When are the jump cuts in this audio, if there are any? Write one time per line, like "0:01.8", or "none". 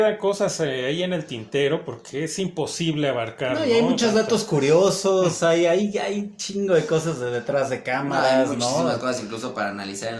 none